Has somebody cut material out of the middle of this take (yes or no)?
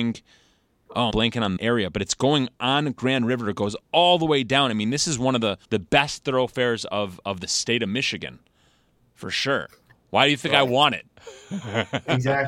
yes